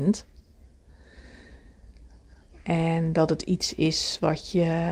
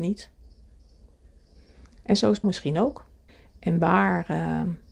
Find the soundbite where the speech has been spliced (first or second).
second